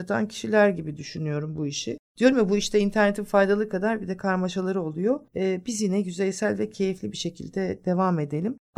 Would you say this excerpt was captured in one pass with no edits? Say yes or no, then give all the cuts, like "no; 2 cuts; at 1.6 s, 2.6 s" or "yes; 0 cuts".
no; 1 cut; at 5.3 s